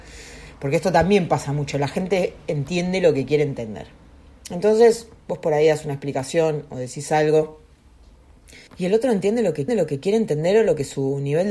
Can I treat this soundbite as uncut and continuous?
no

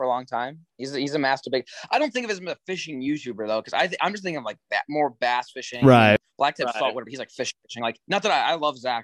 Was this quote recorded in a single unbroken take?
no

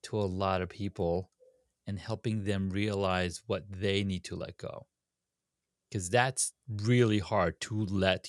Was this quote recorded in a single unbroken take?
yes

